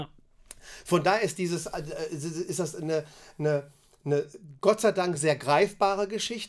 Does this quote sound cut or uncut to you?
uncut